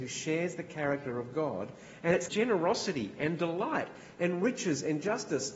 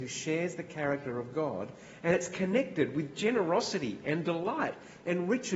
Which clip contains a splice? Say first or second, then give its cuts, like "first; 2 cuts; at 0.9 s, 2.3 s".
first; 1 cut; at 2.3 s